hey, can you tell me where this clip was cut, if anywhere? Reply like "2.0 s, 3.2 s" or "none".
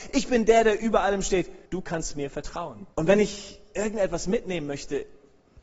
1.7 s, 2.9 s